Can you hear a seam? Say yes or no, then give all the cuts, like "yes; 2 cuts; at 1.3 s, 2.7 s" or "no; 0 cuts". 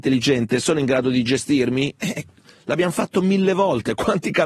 no; 0 cuts